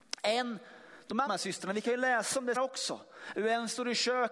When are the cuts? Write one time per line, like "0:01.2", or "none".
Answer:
0:01.3
0:02.6